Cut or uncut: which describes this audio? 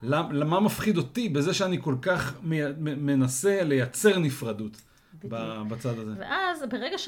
uncut